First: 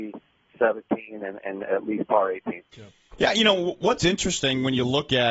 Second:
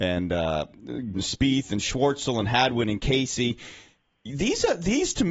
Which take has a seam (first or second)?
second